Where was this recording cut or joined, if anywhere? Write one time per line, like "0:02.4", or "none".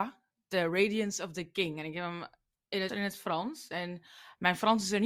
0:02.9